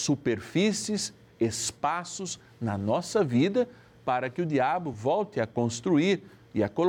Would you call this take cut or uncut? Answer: uncut